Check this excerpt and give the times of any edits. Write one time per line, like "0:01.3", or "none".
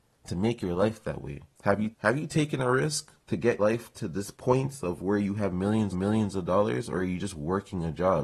0:01.5
0:01.9
0:03.2
0:03.6
0:04.3
0:05.9